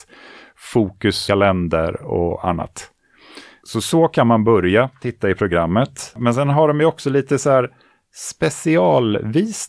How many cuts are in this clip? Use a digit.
1